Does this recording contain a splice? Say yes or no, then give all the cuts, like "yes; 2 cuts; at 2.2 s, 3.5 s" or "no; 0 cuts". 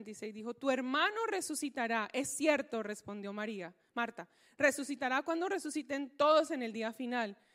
no; 0 cuts